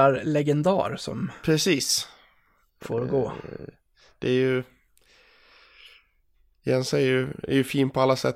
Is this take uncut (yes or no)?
yes